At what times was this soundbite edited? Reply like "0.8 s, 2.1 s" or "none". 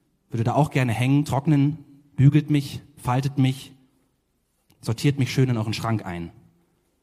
none